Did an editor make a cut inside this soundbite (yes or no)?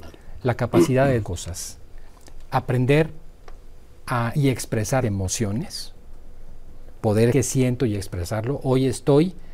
yes